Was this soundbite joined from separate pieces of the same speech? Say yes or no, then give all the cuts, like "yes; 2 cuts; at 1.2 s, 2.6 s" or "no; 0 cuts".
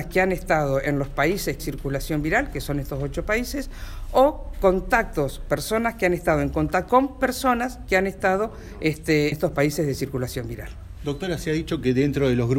yes; 3 cuts; at 1.6 s, 6.9 s, 9.3 s